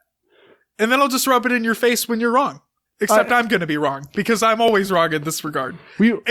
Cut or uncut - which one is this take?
cut